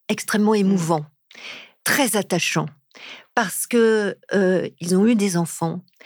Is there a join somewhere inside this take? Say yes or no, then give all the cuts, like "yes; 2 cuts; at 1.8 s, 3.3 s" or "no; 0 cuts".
no; 0 cuts